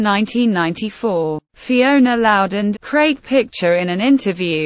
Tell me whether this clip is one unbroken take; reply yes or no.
no